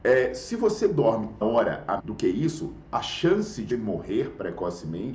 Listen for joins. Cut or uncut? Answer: cut